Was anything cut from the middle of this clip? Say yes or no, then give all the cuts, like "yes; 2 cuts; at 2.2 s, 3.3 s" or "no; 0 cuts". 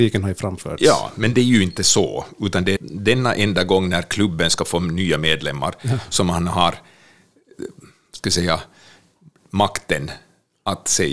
yes; 2 cuts; at 1.3 s, 2.8 s